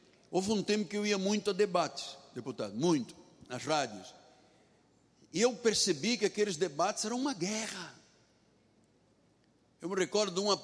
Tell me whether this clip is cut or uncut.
uncut